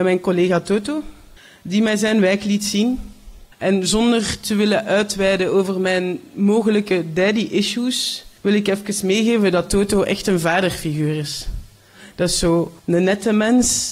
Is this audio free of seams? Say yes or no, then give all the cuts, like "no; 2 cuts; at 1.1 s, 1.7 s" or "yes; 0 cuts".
no; 4 cuts; at 1.4 s, 3.5 s, 8.4 s, 12.8 s